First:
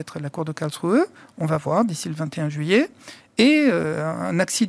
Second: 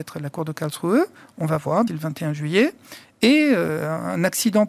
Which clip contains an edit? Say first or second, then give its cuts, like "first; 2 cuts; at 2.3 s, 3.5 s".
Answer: second; 1 cut; at 1.9 s